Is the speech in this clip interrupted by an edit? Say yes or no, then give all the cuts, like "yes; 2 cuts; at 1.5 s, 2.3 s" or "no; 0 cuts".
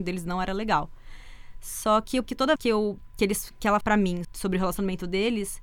yes; 4 cuts; at 2.2 s, 2.6 s, 3.8 s, 4.2 s